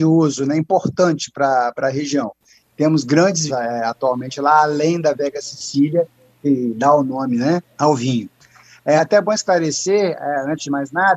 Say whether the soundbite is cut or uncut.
cut